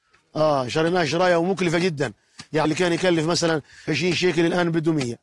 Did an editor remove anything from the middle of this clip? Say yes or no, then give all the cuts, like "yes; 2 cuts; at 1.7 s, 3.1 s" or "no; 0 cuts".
yes; 2 cuts; at 2.6 s, 3.9 s